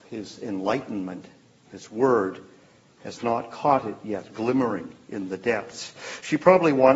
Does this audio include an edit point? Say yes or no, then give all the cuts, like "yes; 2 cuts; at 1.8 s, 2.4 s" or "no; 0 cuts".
no; 0 cuts